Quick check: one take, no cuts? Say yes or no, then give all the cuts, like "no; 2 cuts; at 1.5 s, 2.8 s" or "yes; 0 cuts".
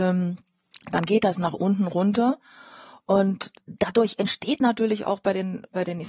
yes; 0 cuts